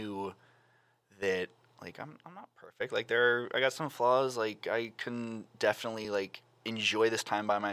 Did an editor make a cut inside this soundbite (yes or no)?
no